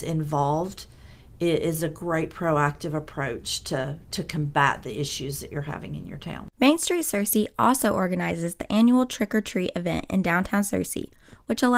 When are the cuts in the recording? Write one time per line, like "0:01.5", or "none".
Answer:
0:06.5